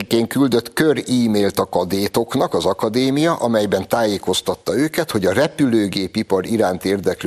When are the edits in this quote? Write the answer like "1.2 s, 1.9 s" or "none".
none